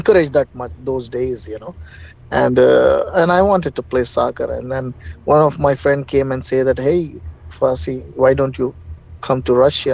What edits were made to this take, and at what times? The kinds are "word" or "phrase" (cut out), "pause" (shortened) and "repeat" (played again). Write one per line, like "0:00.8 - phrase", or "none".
none